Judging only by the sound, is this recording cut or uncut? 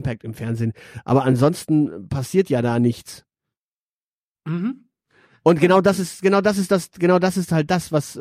uncut